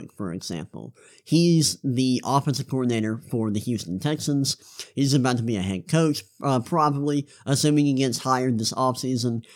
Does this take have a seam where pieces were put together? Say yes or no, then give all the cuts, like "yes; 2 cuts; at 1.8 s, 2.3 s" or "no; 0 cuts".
no; 0 cuts